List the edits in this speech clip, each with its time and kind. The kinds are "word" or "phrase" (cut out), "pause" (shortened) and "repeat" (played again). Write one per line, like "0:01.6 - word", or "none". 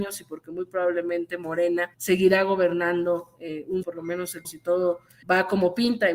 0:01.9 - pause
0:03.8 - word
0:04.4 - word
0:05.2 - word